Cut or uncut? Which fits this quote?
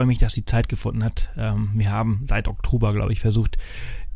uncut